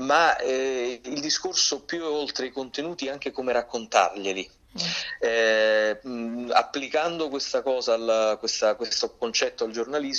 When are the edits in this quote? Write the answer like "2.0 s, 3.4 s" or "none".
none